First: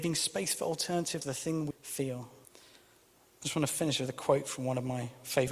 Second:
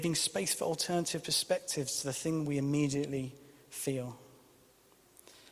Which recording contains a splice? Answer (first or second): first